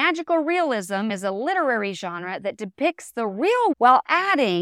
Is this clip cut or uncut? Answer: cut